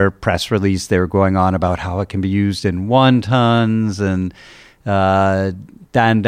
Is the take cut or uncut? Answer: uncut